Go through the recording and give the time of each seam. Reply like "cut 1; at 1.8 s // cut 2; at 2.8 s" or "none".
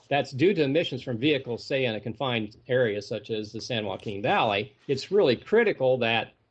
cut 1; at 4.8 s